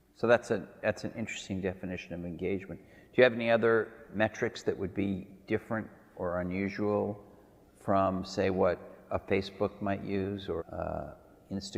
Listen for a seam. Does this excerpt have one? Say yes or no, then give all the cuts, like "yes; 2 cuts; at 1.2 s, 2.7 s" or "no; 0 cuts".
yes; 1 cut; at 10.6 s